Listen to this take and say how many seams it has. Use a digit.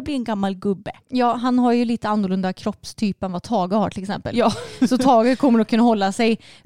1